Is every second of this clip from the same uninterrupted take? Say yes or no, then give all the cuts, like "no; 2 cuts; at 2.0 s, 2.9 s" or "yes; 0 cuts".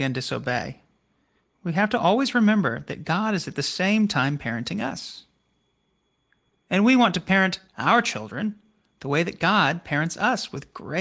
no; 1 cut; at 7.7 s